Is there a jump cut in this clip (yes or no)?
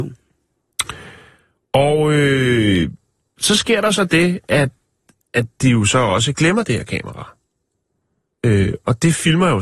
no